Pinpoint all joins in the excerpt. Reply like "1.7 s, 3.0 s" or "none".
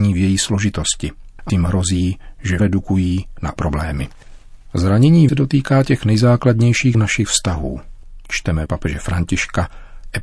1.5 s, 2.6 s, 3.6 s, 5.3 s, 6.9 s, 8.7 s